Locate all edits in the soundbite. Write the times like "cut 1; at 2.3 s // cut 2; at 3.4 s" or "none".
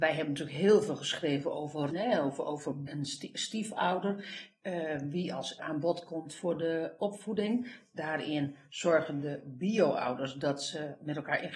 cut 1; at 1.9 s // cut 2; at 2.9 s // cut 3; at 5.6 s